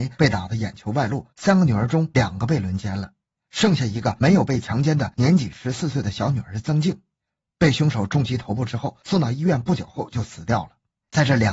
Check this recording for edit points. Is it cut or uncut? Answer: uncut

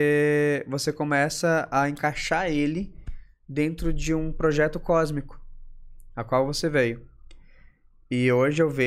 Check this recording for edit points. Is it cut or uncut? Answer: uncut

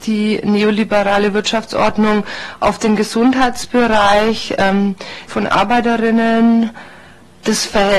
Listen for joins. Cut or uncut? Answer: cut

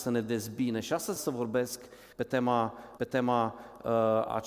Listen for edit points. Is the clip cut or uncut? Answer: cut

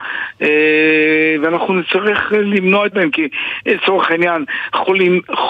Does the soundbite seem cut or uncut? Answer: cut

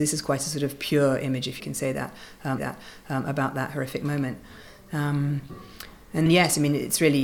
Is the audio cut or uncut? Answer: cut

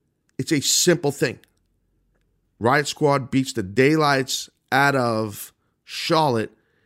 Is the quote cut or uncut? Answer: uncut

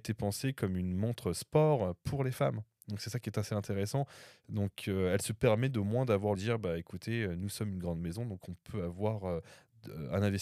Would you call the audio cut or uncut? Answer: cut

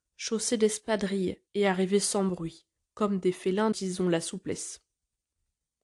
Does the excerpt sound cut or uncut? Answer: cut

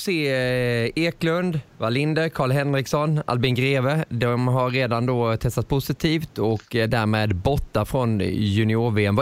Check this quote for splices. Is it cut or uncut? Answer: uncut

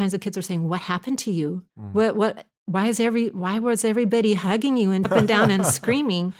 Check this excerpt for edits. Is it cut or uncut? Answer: cut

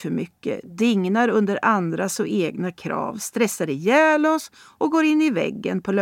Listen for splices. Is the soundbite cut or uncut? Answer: uncut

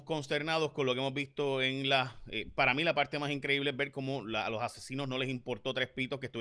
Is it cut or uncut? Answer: uncut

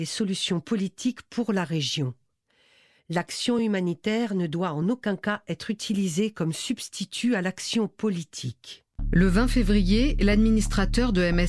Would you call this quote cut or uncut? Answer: uncut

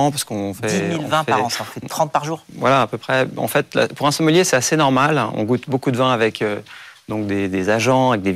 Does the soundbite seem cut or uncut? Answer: uncut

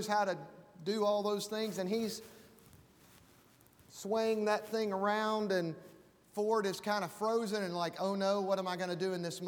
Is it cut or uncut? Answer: uncut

